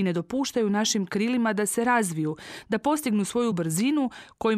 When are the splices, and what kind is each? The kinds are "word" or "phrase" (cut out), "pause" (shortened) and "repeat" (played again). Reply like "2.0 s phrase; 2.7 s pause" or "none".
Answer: none